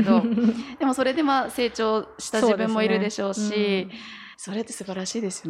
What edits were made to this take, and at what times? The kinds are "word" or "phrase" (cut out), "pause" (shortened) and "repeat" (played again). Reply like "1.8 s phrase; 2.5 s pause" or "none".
4.3 s pause

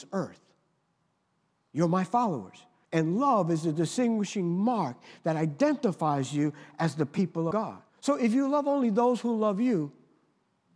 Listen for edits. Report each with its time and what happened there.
2.8 s pause; 7.5 s word; 7.9 s pause

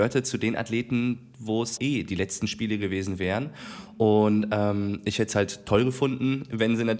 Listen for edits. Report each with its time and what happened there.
1.8 s word

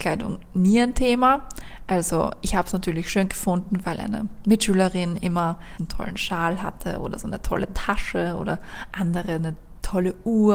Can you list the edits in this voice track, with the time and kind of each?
5.8 s word

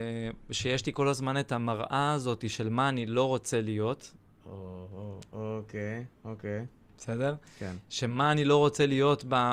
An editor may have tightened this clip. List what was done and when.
none

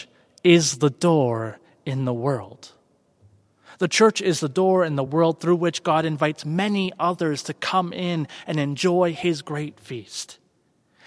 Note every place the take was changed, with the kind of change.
none

